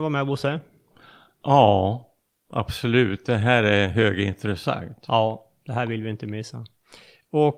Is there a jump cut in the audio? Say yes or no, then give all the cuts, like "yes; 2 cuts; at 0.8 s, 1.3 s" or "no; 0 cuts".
no; 0 cuts